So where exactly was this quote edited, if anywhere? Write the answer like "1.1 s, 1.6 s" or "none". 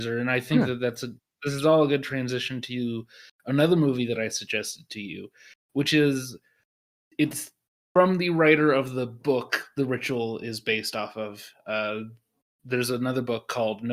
none

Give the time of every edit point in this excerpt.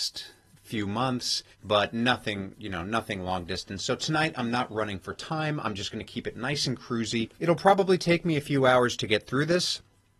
1.5 s, 7.3 s

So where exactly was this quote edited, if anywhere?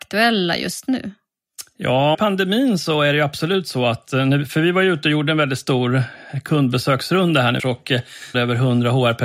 2.1 s, 7.6 s, 8.3 s

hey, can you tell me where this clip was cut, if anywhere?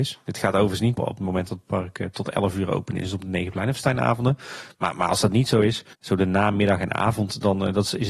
1.0 s, 5.9 s

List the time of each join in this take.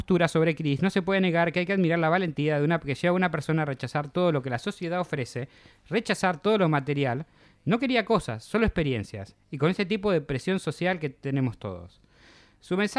none

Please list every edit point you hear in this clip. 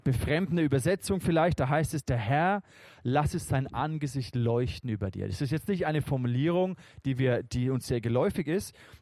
none

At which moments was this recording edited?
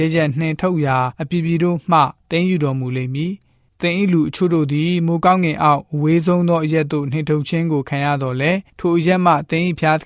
1.1 s, 2.2 s, 8.7 s

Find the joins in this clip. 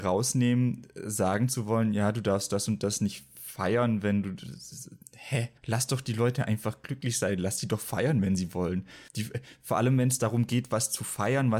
5.6 s, 9.1 s

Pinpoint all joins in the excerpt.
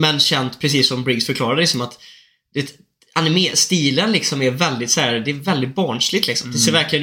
none

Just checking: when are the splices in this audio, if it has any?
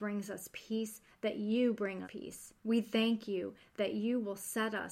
2.0 s, 2.6 s

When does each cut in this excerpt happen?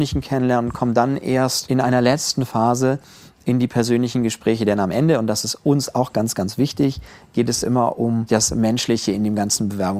none

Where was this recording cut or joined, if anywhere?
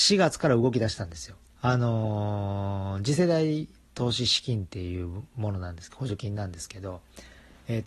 1.6 s, 3.7 s

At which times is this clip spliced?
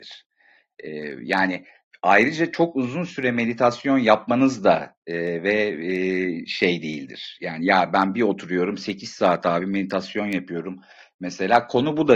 none

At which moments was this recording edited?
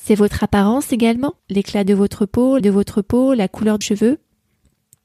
1.4 s, 2.6 s, 3.8 s

